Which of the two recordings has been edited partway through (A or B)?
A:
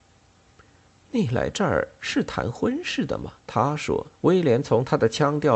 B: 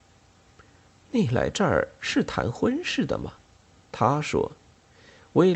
A